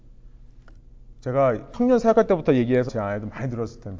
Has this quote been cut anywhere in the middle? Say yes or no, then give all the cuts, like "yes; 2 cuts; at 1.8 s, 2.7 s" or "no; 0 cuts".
yes; 1 cut; at 2.9 s